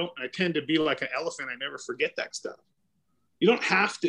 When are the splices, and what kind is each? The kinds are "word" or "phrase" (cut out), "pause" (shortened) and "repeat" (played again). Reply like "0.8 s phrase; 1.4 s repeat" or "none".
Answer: 2.3 s word